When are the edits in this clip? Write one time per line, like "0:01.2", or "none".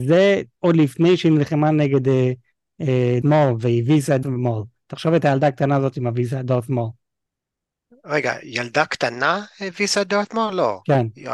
0:03.2
0:04.2

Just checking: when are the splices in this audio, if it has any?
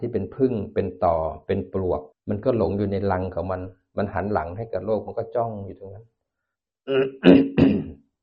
0:02.1

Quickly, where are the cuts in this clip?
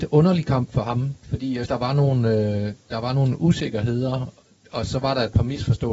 0:01.6

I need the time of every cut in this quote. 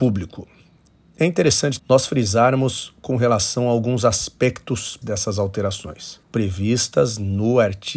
0:01.8
0:05.0
0:06.2

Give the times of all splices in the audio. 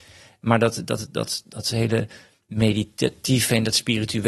none

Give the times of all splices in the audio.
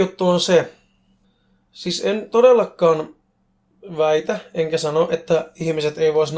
none

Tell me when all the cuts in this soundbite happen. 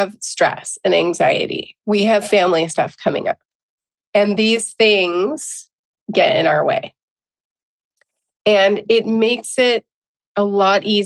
none

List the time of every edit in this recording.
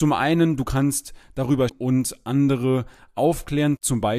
0:01.7

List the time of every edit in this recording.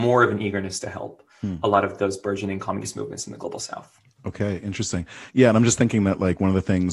none

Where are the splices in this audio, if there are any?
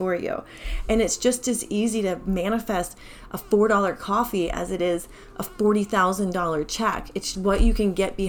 0:07.3

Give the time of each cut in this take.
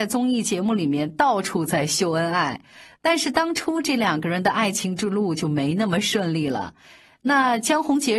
none

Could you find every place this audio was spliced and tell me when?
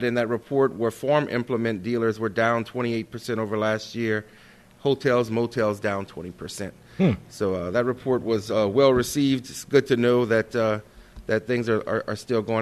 none

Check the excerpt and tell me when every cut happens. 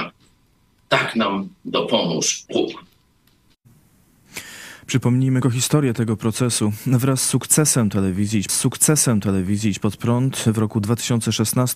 0:02.5
0:05.4
0:08.5

